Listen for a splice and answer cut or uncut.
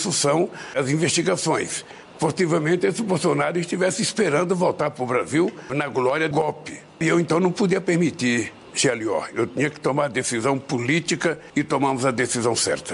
cut